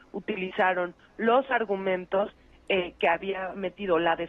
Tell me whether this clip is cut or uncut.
uncut